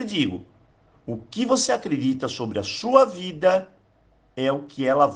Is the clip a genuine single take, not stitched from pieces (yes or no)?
yes